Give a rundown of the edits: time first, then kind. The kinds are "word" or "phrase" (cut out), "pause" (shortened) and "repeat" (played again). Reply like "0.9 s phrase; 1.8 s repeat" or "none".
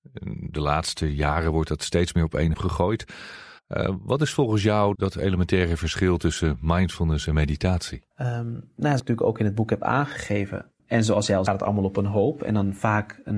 2.5 s word; 3.6 s pause; 4.9 s word; 8.1 s pause; 9.0 s phrase; 10.8 s word; 11.5 s phrase